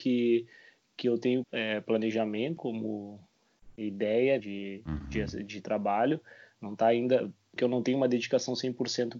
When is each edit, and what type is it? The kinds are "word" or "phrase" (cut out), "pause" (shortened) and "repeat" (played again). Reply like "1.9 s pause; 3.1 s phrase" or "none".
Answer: 1.4 s word; 2.6 s word; 4.4 s word; 7.6 s word